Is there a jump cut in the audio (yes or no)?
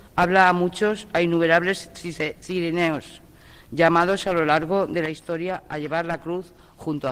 no